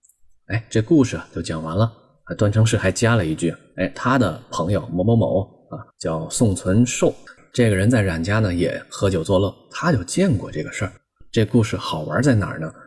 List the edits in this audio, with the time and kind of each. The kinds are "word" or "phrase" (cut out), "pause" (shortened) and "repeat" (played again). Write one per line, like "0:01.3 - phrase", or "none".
0:05.9 - pause